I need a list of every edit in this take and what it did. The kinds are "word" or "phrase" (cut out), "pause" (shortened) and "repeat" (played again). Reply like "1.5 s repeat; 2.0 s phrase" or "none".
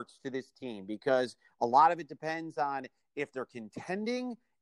none